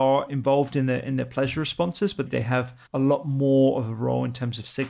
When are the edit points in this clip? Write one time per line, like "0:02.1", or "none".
0:02.3
0:02.9

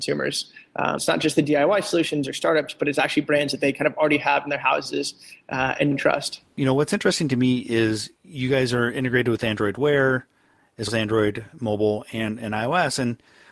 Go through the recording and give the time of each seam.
0:01.0
0:05.9
0:10.9

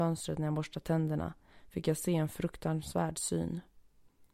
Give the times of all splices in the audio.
none

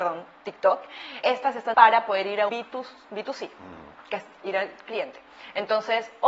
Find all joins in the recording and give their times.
0:01.2
0:01.7
0:02.5

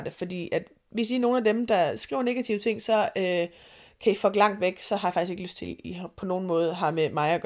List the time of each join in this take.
none

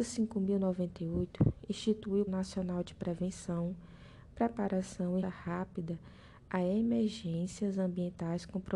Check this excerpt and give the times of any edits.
0:02.3
0:05.2

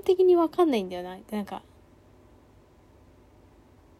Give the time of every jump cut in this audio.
none

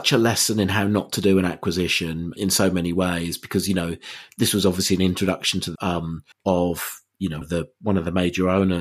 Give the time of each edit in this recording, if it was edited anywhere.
0:02.4
0:05.8
0:06.3
0:07.4

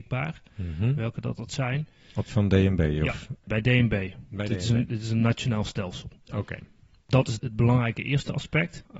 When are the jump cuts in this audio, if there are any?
0:02.3

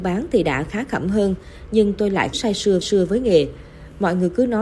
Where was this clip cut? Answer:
0:02.3
0:02.8

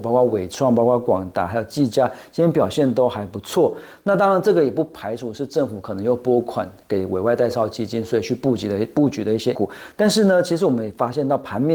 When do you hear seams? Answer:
0:09.5

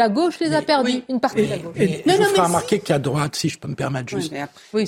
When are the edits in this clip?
none

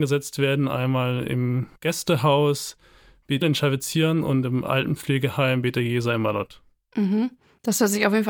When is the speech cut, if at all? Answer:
0:01.8
0:03.4

